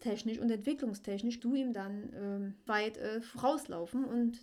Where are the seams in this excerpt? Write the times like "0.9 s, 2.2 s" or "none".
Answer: 1.4 s, 2.7 s